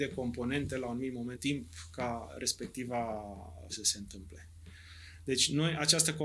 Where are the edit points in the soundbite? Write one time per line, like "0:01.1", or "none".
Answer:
0:01.3
0:03.7